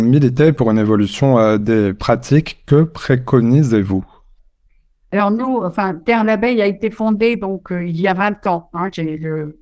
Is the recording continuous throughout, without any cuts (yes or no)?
yes